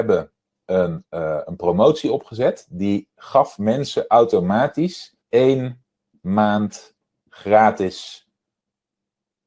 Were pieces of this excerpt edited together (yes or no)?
yes